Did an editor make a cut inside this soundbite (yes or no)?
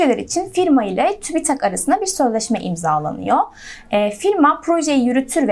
no